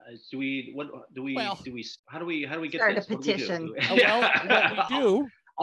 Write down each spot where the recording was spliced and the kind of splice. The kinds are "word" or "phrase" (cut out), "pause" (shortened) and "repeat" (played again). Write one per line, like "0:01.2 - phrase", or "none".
0:02.0 - pause

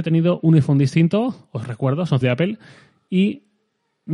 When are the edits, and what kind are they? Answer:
0:02.2 - word

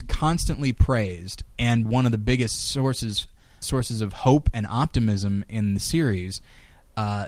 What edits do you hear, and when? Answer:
0:01.8 - word
0:03.6 - word

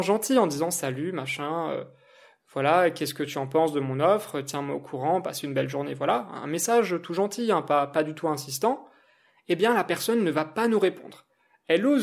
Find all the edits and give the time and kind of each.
none

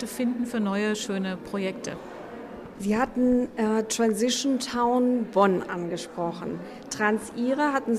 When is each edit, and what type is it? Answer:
none

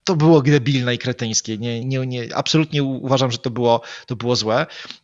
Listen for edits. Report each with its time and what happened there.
0:01.8 - word

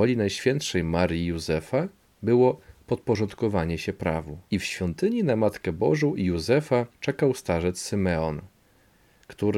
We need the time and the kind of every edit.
0:04.5 - pause
0:06.9 - pause

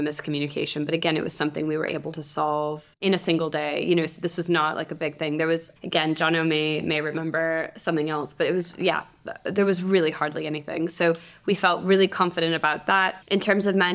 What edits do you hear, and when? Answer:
0:02.9 - pause

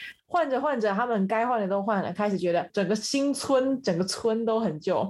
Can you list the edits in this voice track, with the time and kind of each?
0:02.7 - word

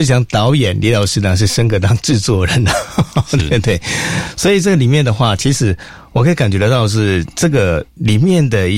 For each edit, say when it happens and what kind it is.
0:07.9 - pause

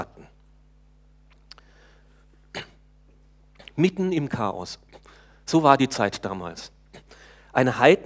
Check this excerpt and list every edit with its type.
0:04.3 - word

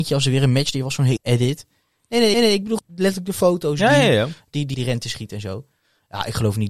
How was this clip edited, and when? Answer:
0:01.2 - phrase
0:02.3 - repeat
0:02.8 - word
0:04.7 - word

